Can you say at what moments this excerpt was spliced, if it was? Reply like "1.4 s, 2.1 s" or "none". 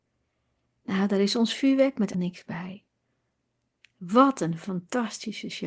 2.1 s